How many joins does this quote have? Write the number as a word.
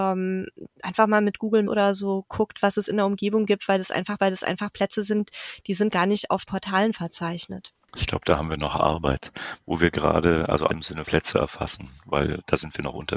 seven